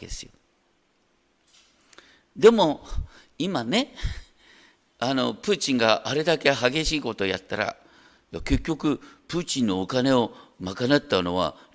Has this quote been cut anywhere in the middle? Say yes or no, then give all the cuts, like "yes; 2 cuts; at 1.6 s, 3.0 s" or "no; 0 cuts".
no; 0 cuts